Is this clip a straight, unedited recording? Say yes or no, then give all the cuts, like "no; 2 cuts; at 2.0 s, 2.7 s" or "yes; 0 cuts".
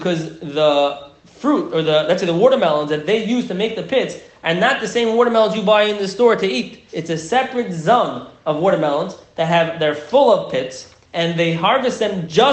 no; 2 cuts; at 6.9 s, 11.0 s